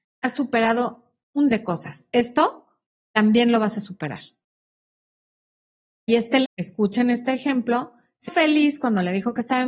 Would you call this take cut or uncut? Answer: cut